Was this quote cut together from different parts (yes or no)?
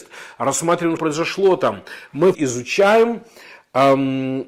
yes